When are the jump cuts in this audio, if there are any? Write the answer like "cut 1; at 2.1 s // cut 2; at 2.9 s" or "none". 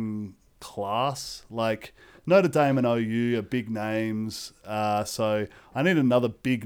none